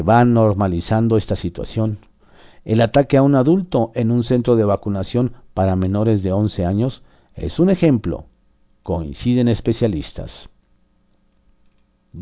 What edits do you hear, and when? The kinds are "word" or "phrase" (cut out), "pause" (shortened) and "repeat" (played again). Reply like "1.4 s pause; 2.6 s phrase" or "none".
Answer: none